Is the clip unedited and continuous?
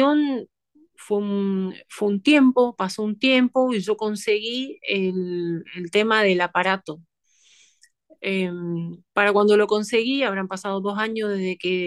yes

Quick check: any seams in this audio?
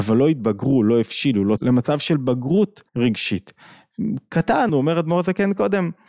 yes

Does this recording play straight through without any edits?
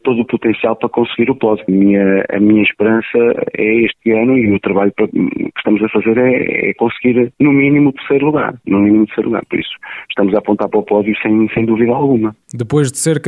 yes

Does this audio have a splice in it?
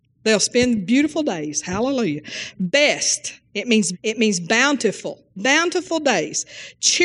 yes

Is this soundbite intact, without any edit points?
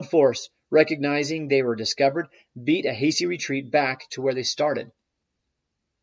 yes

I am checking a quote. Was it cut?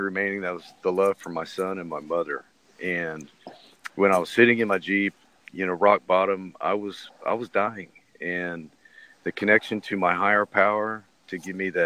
no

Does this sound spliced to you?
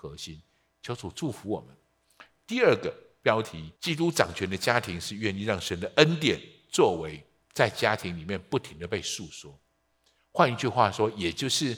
yes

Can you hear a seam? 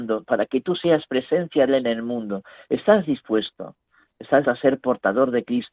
yes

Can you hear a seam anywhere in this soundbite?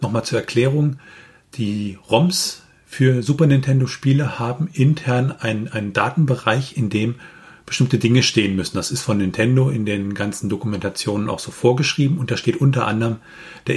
no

